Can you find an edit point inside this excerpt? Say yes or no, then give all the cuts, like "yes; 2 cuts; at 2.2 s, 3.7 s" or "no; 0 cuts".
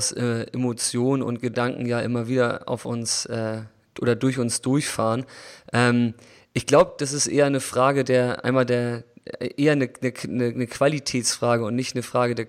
no; 0 cuts